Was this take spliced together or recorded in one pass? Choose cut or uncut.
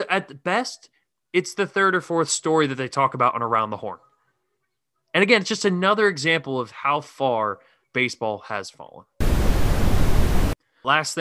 uncut